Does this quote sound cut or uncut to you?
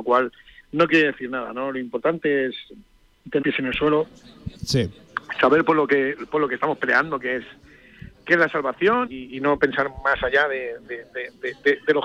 cut